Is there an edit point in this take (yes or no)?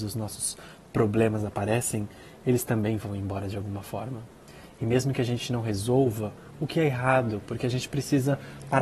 no